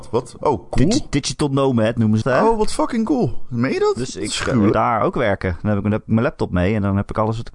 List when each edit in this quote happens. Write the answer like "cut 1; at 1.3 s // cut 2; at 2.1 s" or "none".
cut 1; at 2.2 s // cut 2; at 4.7 s